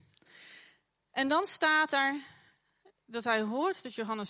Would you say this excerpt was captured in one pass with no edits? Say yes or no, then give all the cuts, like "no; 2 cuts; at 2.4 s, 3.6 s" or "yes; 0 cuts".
yes; 0 cuts